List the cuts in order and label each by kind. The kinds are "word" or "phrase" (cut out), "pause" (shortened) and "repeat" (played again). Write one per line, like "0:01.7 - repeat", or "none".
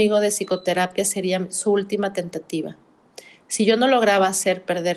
none